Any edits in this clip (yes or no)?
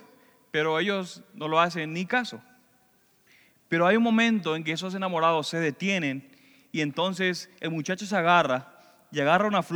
no